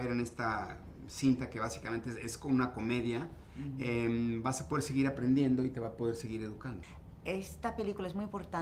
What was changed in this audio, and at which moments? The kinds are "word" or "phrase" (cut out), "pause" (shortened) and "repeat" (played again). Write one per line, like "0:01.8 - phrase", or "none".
none